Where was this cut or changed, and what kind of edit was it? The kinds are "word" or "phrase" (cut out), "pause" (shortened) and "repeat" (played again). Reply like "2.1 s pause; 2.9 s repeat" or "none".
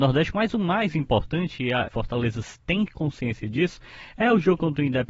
1.9 s phrase